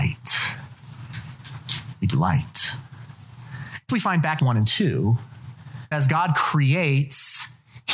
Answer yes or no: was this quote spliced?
yes